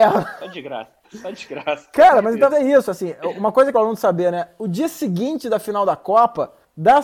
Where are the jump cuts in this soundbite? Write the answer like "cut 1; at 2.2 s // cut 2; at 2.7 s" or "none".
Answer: cut 1; at 1.0 s // cut 2; at 2.5 s // cut 3; at 3.7 s

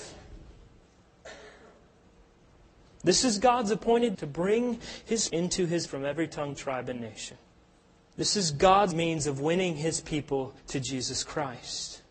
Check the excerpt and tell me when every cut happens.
cut 1; at 4.1 s // cut 2; at 5.3 s // cut 3; at 5.9 s // cut 4; at 7.6 s // cut 5; at 8.9 s // cut 6; at 10.6 s

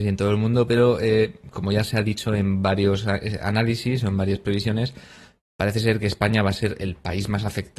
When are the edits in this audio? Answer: none

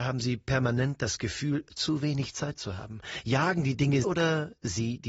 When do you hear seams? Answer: cut 1; at 4.0 s

